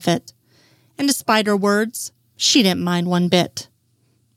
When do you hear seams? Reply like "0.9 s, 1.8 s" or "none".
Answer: none